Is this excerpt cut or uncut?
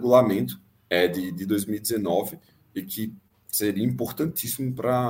uncut